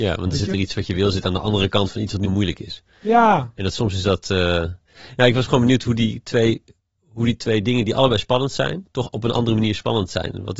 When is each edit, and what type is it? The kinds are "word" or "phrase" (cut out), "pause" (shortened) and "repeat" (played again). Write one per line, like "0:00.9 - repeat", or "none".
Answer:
0:02.2 - word